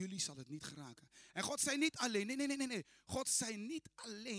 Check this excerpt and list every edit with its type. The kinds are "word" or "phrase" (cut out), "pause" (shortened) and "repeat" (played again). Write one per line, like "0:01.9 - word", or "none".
none

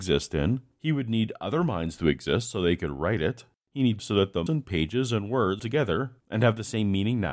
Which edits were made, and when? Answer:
0:04.0 - word
0:04.5 - word
0:05.6 - word

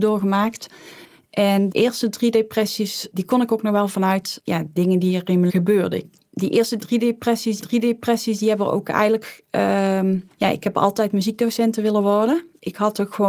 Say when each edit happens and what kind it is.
0:01.7 - word
0:03.9 - word
0:05.5 - word
0:07.6 - repeat
0:10.3 - pause

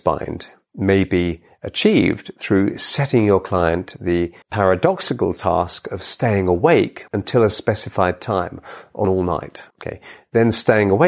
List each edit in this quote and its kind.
0:04.4 - pause
0:07.1 - pause
0:09.0 - word
0:09.7 - pause

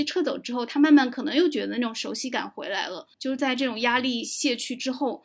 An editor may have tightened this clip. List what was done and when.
0:03.1 - pause

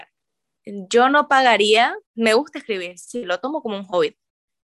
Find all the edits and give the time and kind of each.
0:02.1 - pause

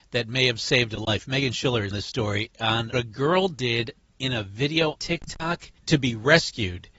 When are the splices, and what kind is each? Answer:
0:01.9 - word
0:02.9 - word
0:05.0 - word
0:05.8 - pause

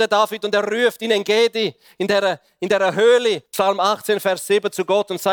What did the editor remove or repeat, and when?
0:03.5 - pause

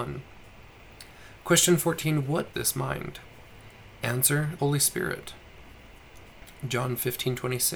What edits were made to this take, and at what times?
0:02.5 - word
0:04.6 - word

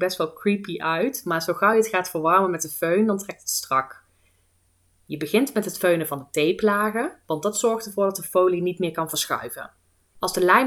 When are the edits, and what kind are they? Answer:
none

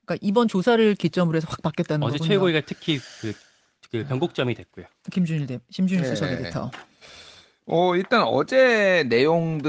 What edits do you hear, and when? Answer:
none

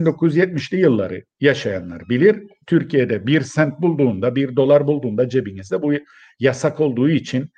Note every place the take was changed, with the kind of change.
none

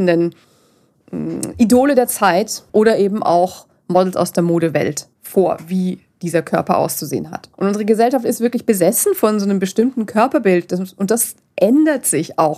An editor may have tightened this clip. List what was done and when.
0:02.7 - pause
0:05.1 - pause
0:07.5 - pause

